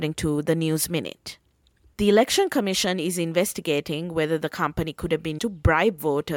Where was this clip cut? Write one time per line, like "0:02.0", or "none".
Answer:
0:05.4